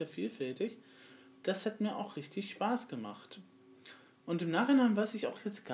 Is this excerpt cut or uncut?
uncut